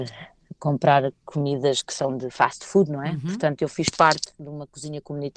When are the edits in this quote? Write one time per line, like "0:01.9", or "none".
none